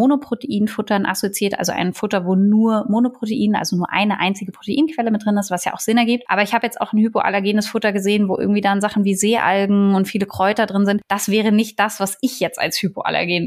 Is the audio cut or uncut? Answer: uncut